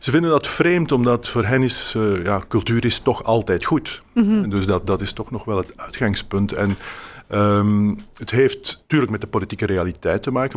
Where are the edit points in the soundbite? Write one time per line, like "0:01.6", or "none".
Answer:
0:08.8